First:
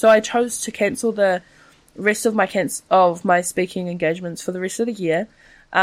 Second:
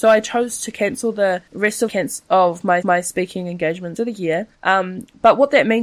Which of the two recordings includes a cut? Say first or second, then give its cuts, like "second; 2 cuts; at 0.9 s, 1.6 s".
second; 5 cuts; at 1.5 s, 1.9 s, 2.8 s, 4.0 s, 4.5 s